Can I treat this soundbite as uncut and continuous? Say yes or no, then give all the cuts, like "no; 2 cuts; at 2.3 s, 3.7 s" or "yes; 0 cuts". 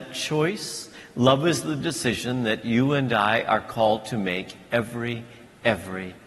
yes; 0 cuts